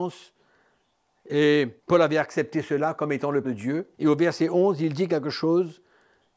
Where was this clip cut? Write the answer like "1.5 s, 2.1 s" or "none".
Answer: 1.8 s, 3.4 s, 3.9 s